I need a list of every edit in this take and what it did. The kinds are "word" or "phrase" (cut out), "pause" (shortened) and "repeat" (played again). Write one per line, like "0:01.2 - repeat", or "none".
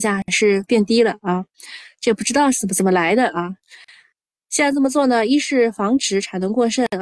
none